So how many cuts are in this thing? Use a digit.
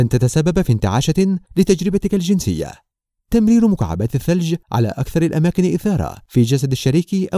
0